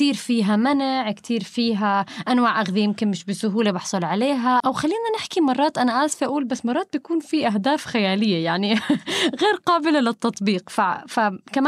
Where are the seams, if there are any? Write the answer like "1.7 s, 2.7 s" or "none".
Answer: 4.6 s